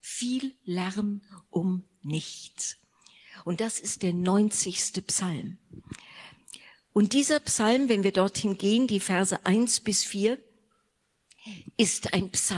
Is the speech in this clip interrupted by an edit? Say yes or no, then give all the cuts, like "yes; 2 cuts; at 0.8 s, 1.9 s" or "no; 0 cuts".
no; 0 cuts